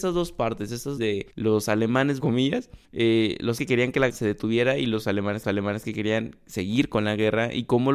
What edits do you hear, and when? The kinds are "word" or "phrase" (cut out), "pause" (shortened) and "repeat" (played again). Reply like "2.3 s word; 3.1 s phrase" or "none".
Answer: 1.0 s phrase; 1.3 s pause; 2.2 s phrase; 2.8 s pause; 3.6 s word; 4.1 s word; 5.4 s repeat